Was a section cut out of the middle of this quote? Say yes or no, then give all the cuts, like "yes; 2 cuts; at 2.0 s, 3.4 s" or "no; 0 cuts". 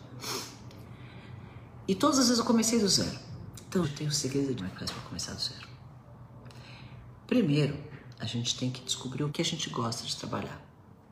yes; 3 cuts; at 3.8 s, 4.6 s, 9.3 s